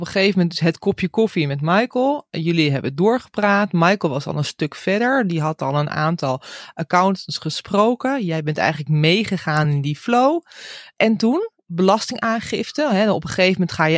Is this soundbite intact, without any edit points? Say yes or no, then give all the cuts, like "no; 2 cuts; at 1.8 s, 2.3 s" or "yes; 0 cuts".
yes; 0 cuts